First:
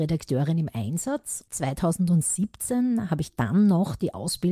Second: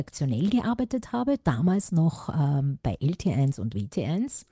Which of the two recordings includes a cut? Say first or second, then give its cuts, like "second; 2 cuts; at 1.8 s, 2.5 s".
first; 1 cut; at 1.5 s